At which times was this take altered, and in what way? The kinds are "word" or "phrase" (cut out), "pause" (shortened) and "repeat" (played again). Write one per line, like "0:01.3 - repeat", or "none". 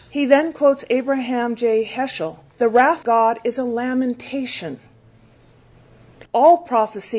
0:02.5 - pause
0:03.0 - word
0:06.3 - pause

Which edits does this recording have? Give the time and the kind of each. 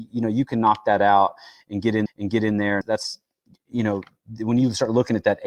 0:02.1 - repeat
0:02.8 - word

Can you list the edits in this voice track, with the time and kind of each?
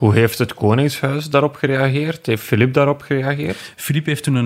none

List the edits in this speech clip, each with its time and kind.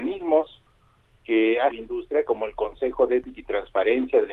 0:01.7 - word

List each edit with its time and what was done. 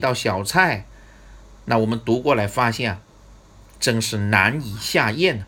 none

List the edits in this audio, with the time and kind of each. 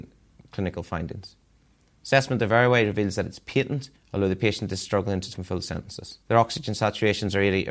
0:04.0 - pause
0:05.3 - word
0:06.2 - pause

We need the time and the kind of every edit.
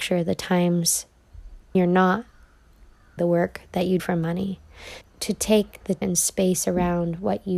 0:01.7 - word
0:03.2 - word
0:04.0 - word
0:05.0 - word
0:06.0 - word

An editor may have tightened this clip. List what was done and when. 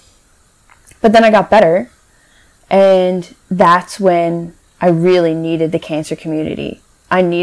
0:03.4 - pause

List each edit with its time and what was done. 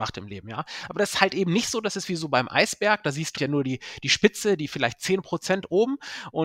0:03.4 - word

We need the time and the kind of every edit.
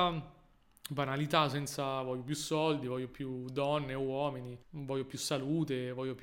0:04.6 - pause

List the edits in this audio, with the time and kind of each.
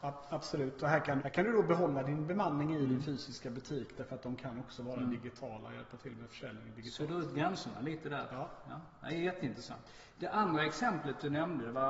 0:01.2 - word

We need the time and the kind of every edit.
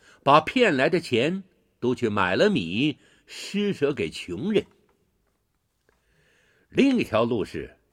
none

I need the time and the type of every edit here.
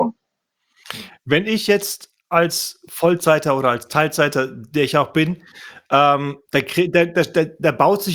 0:06.4 - pause

